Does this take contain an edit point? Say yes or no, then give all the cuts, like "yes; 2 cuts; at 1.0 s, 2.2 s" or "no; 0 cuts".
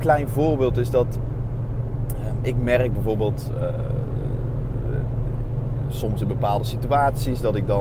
no; 0 cuts